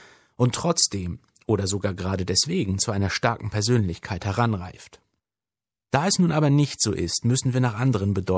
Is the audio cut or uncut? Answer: uncut